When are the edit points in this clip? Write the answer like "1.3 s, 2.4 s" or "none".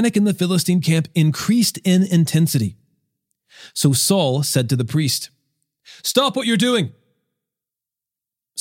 none